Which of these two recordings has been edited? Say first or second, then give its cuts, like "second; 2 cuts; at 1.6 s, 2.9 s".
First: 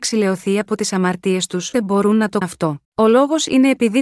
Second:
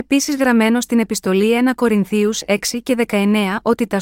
first; 3 cuts; at 1.7 s, 2.4 s, 2.8 s